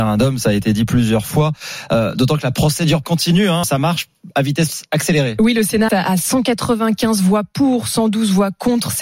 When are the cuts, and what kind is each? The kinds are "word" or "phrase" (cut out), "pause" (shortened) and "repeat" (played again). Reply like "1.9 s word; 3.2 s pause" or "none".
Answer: 3.0 s word; 3.6 s word; 5.9 s phrase